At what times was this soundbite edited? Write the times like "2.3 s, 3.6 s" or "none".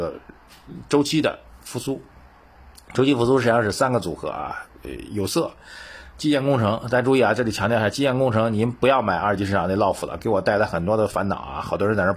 none